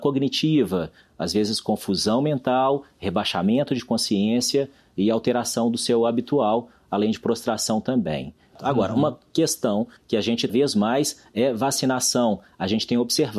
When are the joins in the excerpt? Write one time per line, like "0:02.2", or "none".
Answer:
0:03.8
0:10.0
0:10.5